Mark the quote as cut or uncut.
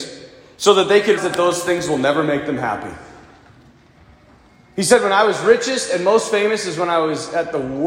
cut